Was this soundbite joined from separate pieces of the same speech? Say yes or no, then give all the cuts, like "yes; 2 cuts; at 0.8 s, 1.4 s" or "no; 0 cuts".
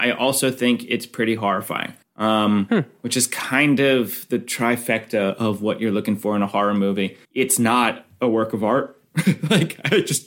yes; 2 cuts; at 2.0 s, 7.2 s